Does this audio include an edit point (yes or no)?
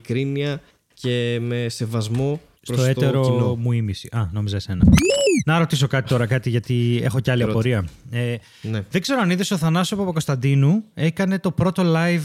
no